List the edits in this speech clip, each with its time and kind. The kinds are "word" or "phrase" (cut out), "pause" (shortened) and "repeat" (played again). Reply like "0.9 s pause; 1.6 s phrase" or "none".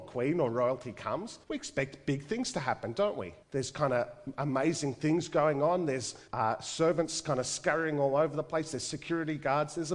1.4 s pause; 3.4 s pause; 6.3 s pause